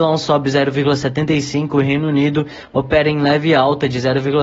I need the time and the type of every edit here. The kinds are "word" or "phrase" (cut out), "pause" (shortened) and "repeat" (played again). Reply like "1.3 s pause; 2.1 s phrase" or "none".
none